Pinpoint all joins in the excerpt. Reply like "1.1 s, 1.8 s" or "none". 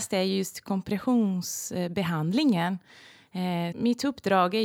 3.7 s